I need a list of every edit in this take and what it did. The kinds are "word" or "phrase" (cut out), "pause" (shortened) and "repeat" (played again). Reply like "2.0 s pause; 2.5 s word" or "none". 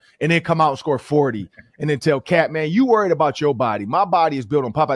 none